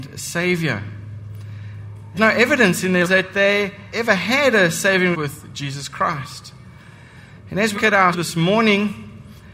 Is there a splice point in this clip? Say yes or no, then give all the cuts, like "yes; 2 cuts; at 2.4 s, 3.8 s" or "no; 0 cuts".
yes; 6 cuts; at 2.2 s, 3.0 s, 3.9 s, 5.1 s, 7.8 s, 8.1 s